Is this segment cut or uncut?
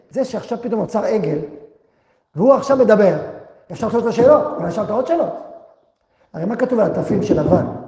uncut